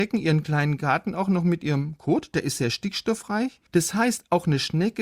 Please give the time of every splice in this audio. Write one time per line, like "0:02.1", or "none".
0:03.7